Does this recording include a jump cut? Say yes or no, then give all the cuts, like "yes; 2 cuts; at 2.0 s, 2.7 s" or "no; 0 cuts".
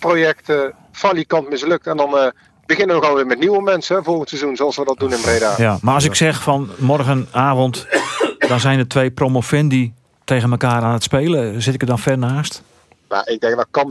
no; 0 cuts